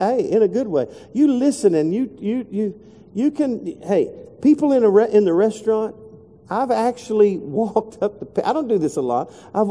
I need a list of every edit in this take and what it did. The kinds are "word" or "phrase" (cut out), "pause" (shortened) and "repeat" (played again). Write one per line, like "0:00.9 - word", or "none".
none